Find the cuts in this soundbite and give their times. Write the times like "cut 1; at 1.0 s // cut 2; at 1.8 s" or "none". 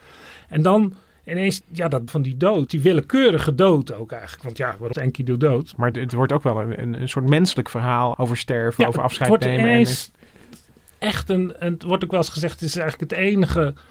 cut 1; at 1.6 s // cut 2; at 2.1 s // cut 3; at 2.7 s // cut 4; at 4.9 s // cut 5; at 5.9 s // cut 6; at 7.0 s // cut 7; at 8.1 s